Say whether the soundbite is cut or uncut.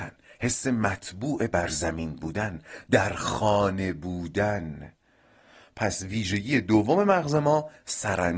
uncut